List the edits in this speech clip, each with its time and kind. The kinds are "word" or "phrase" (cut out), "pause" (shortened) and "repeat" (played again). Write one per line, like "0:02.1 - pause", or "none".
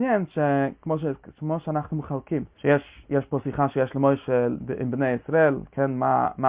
0:02.5 - pause